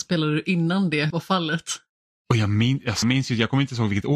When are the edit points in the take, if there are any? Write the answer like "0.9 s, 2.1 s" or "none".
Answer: 1.1 s, 3.0 s